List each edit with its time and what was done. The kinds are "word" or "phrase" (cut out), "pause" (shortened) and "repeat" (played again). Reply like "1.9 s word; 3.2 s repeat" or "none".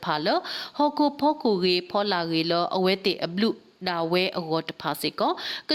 none